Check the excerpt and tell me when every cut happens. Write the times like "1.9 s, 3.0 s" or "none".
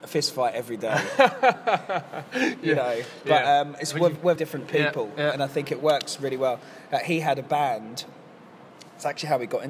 4.4 s